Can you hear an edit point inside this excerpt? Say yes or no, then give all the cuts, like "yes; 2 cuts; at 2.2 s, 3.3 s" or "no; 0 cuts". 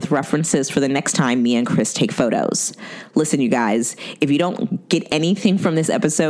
no; 0 cuts